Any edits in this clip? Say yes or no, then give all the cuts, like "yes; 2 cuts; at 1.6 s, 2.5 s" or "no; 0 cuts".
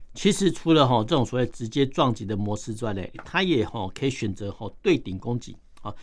yes; 1 cut; at 3.1 s